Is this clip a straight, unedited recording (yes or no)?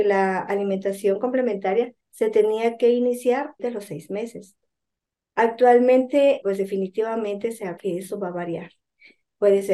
no